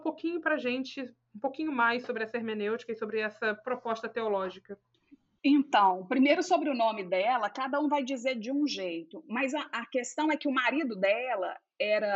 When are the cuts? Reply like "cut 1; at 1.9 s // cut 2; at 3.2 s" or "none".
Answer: cut 1; at 4.9 s